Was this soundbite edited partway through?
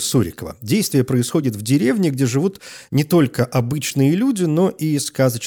no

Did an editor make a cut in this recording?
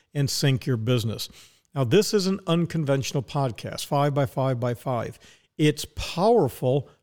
no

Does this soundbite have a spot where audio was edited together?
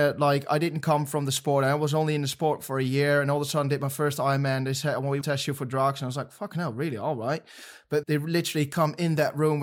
yes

